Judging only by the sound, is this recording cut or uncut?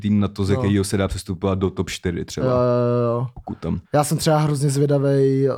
cut